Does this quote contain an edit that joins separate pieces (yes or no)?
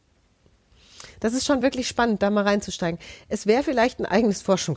no